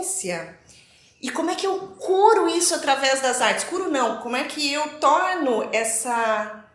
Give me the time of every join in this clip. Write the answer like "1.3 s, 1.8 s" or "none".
none